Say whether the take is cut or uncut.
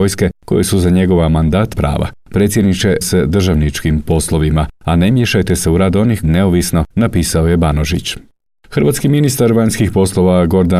cut